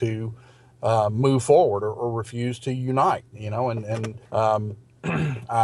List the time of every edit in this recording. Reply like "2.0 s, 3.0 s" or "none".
4.3 s